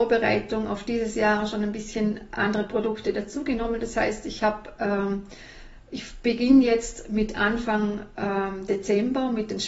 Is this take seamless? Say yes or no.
yes